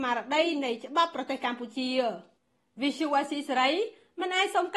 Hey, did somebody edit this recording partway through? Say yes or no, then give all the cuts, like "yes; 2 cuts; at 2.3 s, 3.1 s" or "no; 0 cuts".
no; 0 cuts